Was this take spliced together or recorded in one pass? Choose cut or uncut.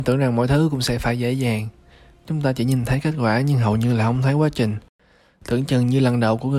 uncut